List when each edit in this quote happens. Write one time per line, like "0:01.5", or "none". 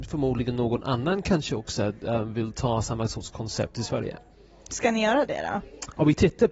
none